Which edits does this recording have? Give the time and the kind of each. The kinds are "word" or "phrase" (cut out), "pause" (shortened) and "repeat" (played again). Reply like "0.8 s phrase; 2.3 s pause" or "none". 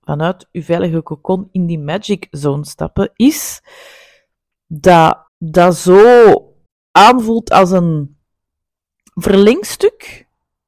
5.3 s pause; 6.7 s pause